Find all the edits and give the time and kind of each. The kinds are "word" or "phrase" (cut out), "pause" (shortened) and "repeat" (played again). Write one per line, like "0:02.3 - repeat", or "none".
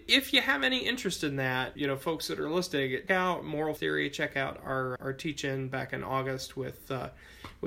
0:01.8 - word
0:03.1 - word
0:03.8 - word
0:05.0 - word